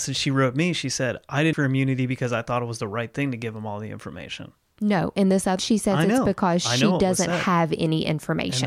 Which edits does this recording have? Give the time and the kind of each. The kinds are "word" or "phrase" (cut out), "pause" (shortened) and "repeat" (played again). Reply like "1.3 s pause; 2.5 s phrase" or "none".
1.5 s word; 5.6 s word